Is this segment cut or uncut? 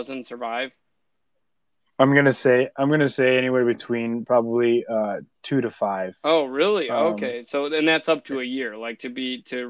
uncut